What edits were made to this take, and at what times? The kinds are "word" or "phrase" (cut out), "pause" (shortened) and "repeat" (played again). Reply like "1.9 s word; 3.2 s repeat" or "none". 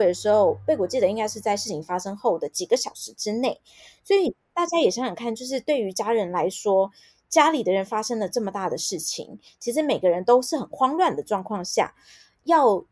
none